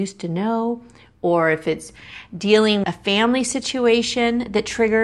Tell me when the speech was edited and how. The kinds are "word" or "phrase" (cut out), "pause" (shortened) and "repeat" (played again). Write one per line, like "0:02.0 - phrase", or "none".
0:02.8 - word